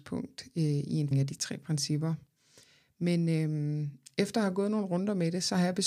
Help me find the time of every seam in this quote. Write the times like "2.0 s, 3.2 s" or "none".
1.1 s

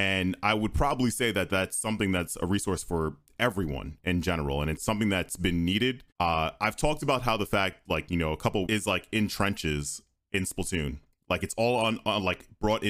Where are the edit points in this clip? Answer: 4.8 s, 6.1 s, 8.7 s

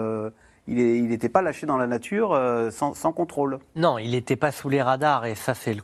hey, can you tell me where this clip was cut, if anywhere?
none

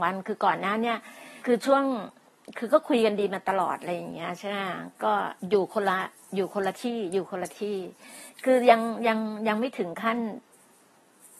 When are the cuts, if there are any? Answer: 1.4 s, 5.4 s, 6.3 s

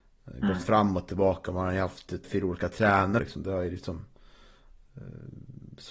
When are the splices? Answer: 2.2 s, 3.2 s

